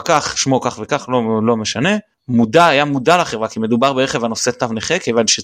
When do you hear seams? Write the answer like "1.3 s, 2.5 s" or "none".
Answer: none